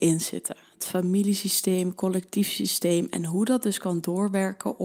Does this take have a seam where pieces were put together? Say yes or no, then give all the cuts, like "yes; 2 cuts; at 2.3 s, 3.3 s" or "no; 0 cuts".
no; 0 cuts